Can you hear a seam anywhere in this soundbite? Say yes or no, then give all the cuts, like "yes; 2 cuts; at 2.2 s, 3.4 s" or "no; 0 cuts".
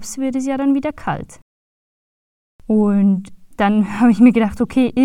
no; 0 cuts